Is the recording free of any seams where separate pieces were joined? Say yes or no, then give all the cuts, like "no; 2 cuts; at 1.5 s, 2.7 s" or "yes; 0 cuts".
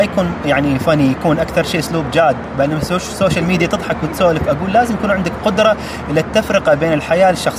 yes; 0 cuts